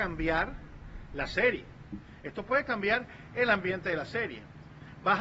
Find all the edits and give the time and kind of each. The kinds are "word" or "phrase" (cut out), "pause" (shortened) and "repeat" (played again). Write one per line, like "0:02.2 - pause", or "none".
none